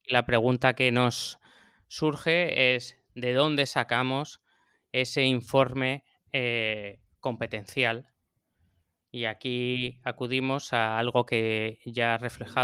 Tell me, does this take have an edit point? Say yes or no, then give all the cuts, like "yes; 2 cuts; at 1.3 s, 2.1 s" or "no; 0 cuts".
no; 0 cuts